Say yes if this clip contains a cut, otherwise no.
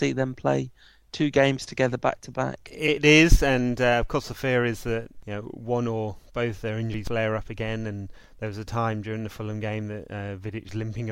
no